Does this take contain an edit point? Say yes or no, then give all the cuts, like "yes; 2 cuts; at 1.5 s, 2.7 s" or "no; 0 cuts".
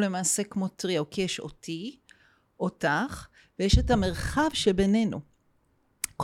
no; 0 cuts